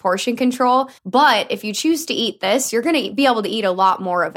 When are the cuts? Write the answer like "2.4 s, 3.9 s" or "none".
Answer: 1.0 s